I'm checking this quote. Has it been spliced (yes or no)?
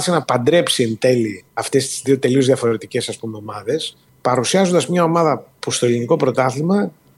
yes